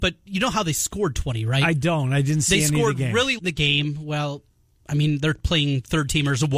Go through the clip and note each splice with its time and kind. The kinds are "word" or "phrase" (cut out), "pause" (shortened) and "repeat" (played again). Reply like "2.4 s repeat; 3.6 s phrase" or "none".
3.4 s word